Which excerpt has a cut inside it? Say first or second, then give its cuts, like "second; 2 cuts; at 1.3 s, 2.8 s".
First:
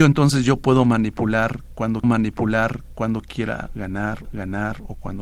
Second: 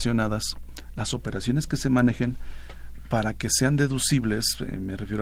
first; 2 cuts; at 2.0 s, 4.2 s